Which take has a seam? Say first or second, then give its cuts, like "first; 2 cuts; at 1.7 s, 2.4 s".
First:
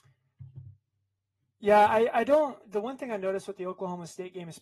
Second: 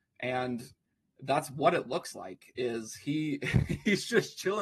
first; 1 cut; at 2.6 s